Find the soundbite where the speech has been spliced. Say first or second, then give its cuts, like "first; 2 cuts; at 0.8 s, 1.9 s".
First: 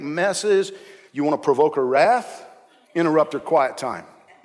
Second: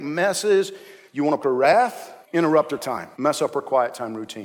second; 4 cuts; at 1.4 s, 2.2 s, 2.8 s, 3.1 s